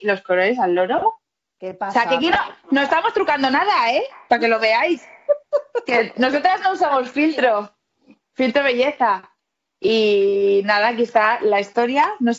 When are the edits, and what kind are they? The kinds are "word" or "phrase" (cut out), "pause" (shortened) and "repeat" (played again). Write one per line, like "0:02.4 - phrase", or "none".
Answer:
none